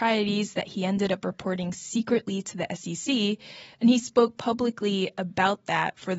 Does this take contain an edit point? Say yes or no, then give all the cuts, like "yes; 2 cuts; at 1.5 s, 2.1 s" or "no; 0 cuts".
no; 0 cuts